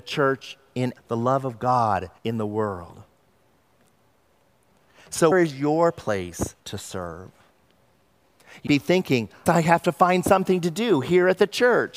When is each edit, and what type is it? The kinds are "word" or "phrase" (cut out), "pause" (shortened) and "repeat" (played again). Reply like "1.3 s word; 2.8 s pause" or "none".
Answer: 1.0 s phrase; 2.2 s pause; 5.3 s word; 6.6 s pause; 8.7 s word; 9.5 s phrase